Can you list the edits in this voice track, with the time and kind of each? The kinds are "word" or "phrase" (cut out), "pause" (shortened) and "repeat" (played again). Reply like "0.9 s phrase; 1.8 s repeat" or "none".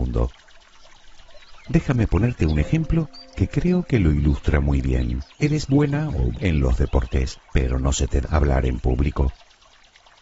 5.3 s pause; 6.3 s word; 7.4 s pause; 8.2 s phrase